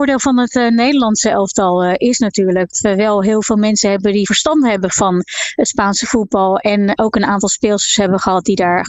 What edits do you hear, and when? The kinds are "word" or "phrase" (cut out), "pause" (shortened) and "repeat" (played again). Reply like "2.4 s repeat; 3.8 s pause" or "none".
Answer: 2.7 s word; 4.3 s word; 7.0 s word